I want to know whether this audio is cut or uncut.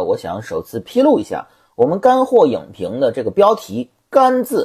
uncut